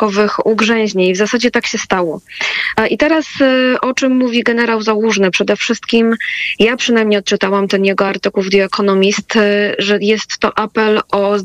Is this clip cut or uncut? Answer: uncut